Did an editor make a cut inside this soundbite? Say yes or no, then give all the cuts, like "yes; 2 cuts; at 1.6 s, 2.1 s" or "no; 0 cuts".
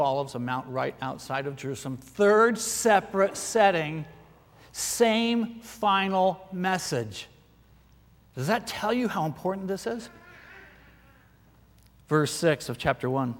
no; 0 cuts